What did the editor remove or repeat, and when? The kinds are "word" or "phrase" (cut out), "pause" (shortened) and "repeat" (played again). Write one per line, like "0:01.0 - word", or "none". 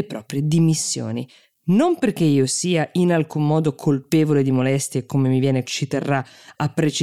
0:05.6 - word